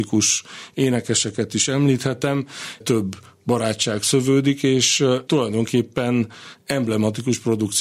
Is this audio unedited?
no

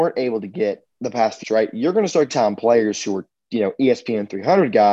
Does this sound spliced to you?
yes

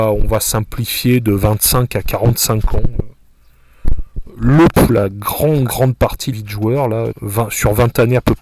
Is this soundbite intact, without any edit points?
no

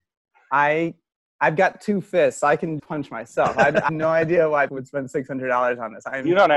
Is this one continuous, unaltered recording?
no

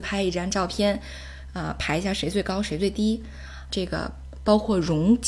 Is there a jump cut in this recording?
yes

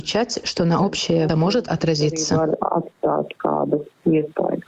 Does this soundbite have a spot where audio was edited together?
yes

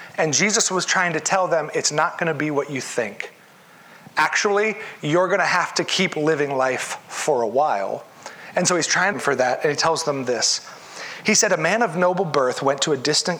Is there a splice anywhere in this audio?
yes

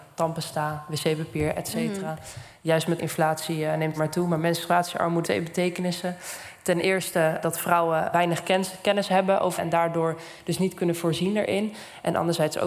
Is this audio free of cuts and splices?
no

